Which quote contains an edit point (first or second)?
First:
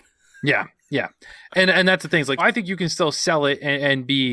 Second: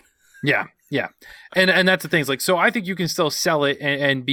first